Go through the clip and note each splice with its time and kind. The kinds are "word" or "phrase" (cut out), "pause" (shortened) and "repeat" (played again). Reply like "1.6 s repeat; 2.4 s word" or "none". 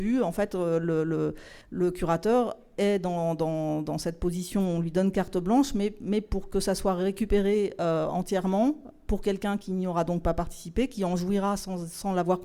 1.6 s pause